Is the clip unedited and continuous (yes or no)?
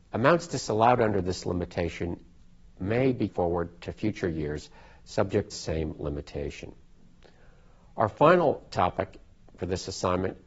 no